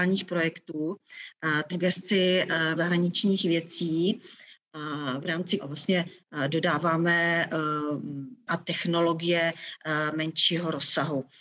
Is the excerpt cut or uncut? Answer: cut